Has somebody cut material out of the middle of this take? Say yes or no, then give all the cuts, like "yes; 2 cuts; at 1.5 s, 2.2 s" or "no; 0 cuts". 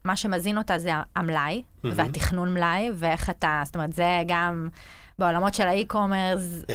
no; 0 cuts